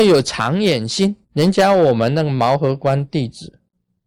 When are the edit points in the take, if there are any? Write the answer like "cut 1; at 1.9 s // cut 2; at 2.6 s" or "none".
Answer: cut 1; at 1.2 s